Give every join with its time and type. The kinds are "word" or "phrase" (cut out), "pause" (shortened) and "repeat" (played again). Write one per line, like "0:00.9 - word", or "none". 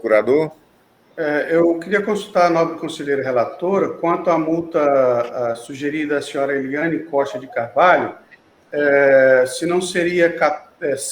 none